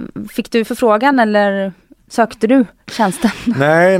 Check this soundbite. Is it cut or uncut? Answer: uncut